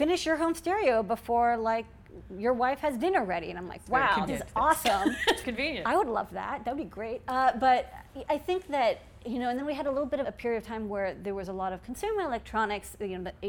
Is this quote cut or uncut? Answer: cut